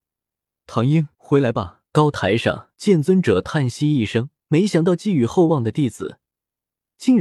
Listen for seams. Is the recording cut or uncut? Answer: cut